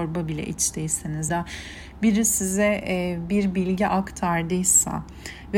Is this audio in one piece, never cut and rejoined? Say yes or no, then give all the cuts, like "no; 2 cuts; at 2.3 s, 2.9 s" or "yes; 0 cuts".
no; 1 cut; at 1.3 s